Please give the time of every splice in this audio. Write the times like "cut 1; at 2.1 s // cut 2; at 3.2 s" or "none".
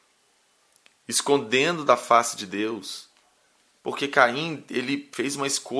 none